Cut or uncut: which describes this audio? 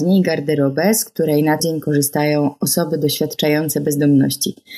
cut